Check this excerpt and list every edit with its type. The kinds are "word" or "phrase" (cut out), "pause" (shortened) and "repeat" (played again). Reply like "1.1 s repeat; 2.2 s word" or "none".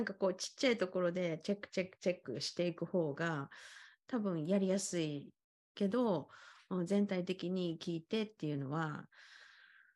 5.4 s pause